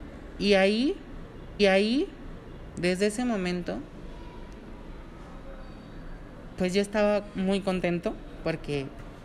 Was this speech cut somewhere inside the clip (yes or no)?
yes